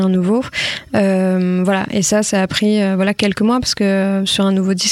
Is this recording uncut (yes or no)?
yes